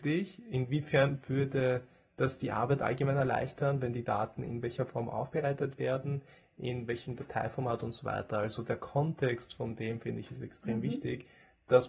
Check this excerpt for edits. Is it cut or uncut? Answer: uncut